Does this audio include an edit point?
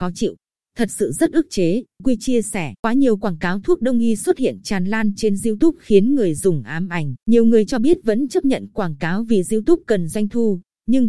yes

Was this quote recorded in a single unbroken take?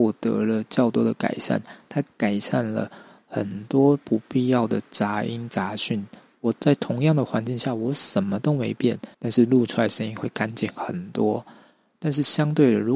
no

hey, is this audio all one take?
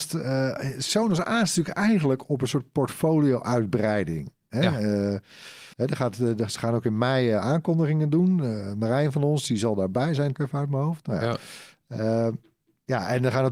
no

